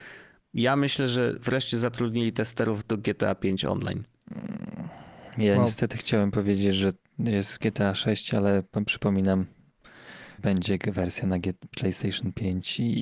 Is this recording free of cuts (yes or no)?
no